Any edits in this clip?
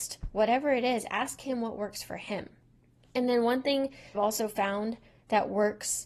yes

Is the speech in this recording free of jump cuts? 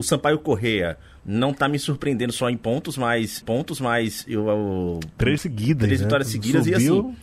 no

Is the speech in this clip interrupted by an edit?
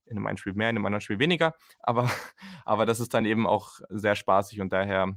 no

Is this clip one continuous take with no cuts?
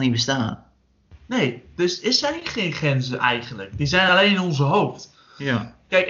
yes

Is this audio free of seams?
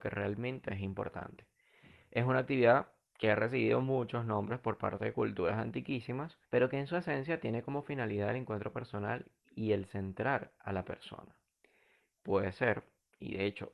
no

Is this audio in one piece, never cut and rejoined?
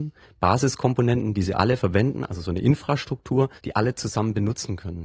no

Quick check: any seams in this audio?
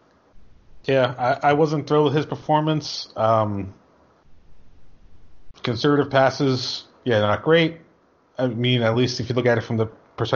no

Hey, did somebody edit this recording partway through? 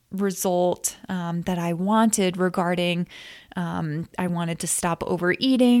no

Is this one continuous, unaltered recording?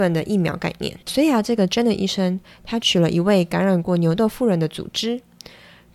no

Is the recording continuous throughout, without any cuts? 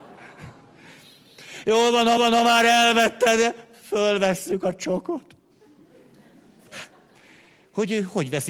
no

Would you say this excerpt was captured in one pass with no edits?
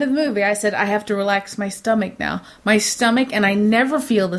yes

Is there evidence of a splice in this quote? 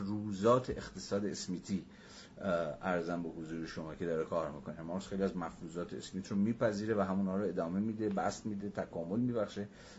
no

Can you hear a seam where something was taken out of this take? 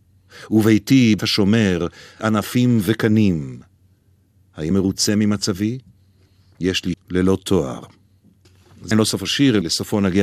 yes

